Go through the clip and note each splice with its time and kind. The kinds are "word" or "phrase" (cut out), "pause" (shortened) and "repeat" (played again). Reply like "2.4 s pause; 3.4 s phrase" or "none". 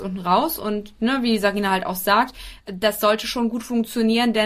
2.6 s pause